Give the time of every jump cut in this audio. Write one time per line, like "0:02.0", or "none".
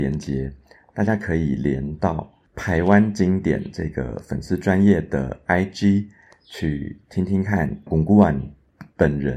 0:07.9